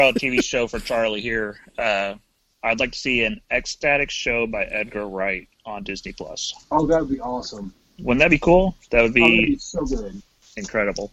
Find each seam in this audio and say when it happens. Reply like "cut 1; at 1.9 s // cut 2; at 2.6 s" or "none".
cut 1; at 2.4 s // cut 2; at 6.6 s // cut 3; at 7.8 s